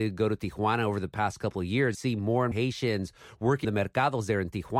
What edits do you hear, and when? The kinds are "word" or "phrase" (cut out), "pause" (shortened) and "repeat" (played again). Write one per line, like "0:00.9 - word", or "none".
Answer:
0:01.9 - word
0:02.5 - word
0:03.6 - word